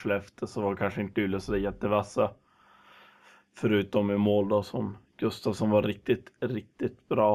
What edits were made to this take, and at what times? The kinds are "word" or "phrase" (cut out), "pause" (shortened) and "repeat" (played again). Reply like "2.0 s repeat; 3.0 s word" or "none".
none